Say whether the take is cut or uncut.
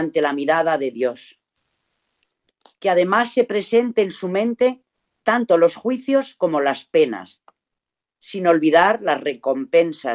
uncut